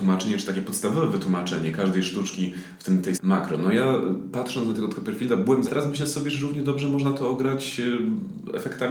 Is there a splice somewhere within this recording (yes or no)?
yes